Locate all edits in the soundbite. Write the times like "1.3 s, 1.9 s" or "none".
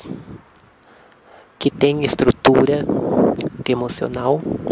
3.6 s